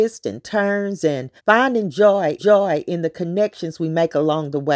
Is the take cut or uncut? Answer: cut